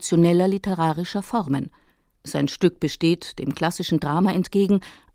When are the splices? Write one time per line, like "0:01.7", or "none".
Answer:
none